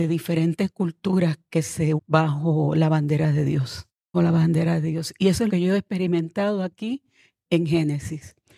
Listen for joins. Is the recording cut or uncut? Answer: cut